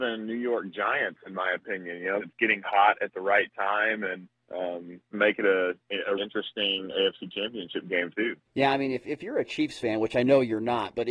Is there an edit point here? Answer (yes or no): yes